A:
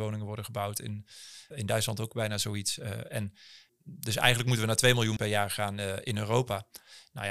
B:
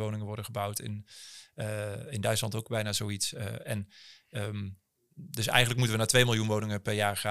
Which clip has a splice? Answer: A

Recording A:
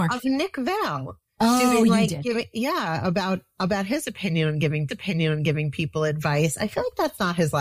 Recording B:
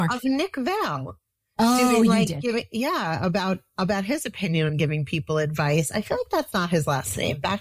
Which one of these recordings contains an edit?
A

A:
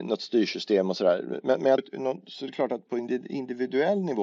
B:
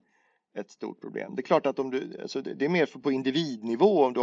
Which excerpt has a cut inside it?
A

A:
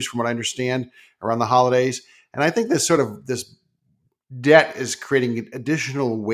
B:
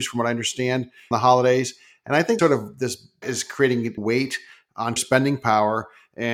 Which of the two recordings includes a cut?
B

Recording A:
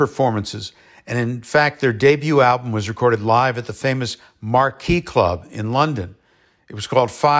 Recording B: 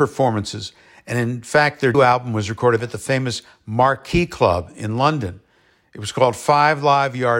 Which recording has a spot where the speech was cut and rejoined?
B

